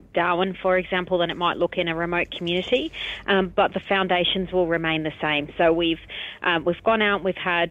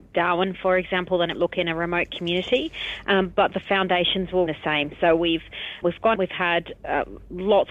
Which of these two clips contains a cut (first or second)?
second